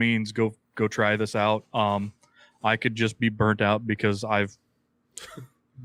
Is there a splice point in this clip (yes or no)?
no